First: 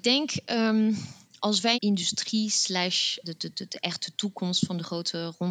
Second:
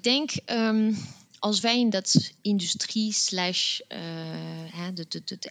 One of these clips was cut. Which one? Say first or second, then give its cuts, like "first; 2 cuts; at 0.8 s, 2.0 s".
first; 2 cuts; at 1.7 s, 3.2 s